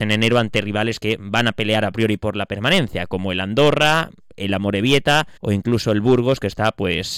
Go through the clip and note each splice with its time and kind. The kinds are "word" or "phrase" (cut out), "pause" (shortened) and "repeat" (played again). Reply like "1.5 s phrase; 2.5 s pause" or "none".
5.4 s pause